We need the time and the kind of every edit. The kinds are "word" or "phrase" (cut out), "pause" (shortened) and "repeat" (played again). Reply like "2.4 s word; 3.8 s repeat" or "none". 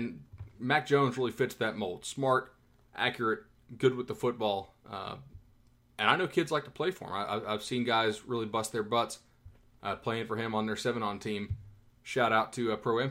none